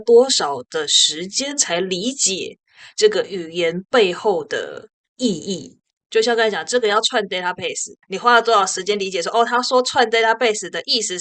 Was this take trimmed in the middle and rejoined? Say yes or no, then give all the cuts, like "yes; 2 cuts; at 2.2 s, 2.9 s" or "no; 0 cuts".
yes; 2 cuts; at 6.0 s, 8.0 s